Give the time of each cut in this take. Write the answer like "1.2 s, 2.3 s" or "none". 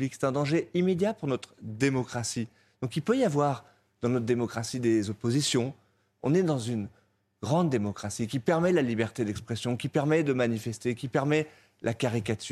none